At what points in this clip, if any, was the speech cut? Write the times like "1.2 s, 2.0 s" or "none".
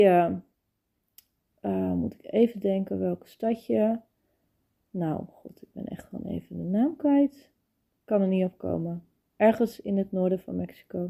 none